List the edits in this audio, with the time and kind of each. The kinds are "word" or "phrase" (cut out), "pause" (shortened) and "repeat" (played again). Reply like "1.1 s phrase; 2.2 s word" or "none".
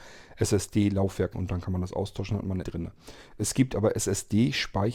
1.3 s word; 2.6 s word